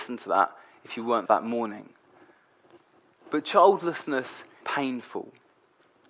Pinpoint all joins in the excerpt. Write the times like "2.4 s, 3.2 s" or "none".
1.3 s, 4.6 s